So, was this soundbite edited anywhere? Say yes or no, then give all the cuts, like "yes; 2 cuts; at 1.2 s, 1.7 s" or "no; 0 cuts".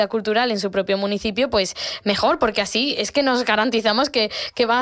no; 0 cuts